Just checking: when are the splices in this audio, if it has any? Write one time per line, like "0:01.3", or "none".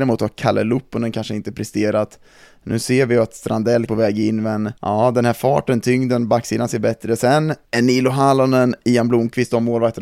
0:03.9
0:04.8
0:07.7